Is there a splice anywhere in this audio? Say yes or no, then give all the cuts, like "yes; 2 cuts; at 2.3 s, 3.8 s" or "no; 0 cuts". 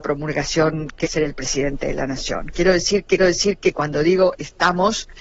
yes; 2 cuts; at 1.0 s, 3.2 s